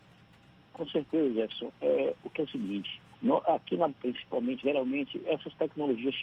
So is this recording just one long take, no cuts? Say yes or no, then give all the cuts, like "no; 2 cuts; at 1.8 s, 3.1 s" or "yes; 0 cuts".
no; 4 cuts; at 2.3 s, 3.1 s, 3.9 s, 4.6 s